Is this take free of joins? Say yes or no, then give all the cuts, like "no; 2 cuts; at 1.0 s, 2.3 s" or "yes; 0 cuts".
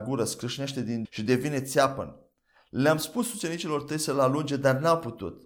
no; 1 cut; at 1.0 s